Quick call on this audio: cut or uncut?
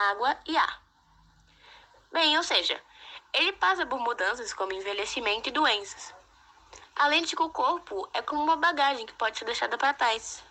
uncut